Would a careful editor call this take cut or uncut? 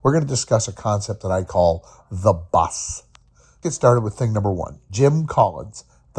cut